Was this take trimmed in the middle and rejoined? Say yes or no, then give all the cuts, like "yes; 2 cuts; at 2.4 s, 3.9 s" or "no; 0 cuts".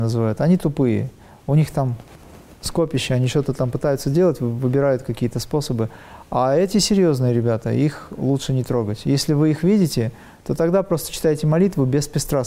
no; 0 cuts